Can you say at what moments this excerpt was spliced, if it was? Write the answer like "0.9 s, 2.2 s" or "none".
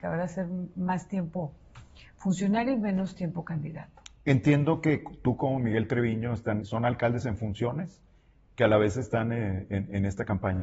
6.6 s